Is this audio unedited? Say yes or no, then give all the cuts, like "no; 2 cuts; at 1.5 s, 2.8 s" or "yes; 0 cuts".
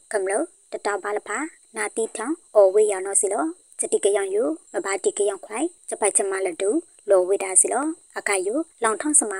yes; 0 cuts